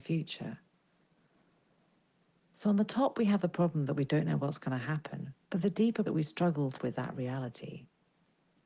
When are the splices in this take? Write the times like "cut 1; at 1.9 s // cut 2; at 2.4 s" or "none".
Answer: cut 1; at 5.4 s // cut 2; at 6.1 s // cut 3; at 6.8 s